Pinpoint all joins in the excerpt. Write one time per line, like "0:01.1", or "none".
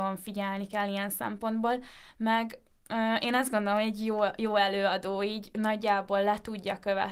none